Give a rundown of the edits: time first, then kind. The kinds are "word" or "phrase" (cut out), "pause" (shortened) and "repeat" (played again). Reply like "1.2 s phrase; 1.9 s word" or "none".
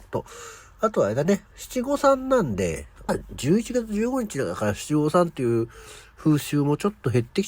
3.1 s phrase